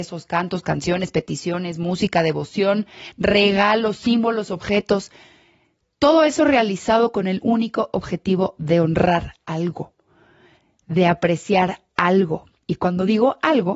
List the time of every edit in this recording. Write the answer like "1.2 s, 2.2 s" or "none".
9.4 s